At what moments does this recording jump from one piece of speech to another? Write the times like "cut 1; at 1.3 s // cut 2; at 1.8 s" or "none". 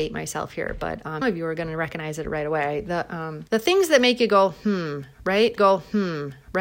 cut 1; at 1.2 s // cut 2; at 3.5 s // cut 3; at 5.6 s